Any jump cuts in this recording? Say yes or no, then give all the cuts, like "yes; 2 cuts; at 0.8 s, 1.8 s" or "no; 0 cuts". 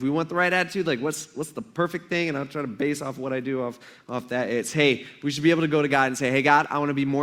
no; 0 cuts